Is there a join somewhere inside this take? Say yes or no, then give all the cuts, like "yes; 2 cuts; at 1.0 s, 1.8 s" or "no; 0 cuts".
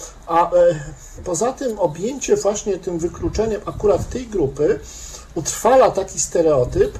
no; 0 cuts